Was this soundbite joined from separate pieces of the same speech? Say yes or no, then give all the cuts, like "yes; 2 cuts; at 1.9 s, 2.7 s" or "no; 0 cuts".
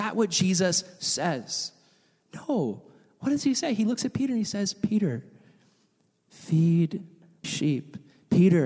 yes; 1 cut; at 7.4 s